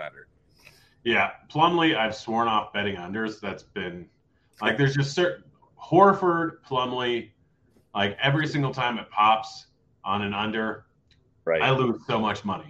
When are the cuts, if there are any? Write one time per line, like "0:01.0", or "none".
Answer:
none